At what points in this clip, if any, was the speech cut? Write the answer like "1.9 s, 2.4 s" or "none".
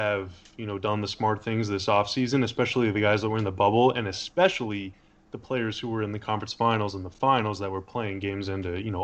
none